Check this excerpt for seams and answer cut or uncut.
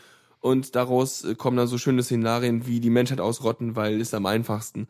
uncut